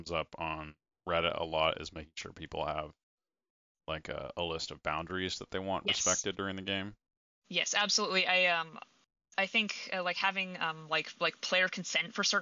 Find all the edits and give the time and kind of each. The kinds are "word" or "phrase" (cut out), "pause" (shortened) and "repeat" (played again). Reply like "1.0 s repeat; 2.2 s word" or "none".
none